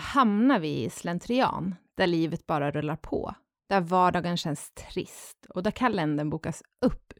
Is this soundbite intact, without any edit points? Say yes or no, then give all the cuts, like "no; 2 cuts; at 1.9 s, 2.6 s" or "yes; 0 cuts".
yes; 0 cuts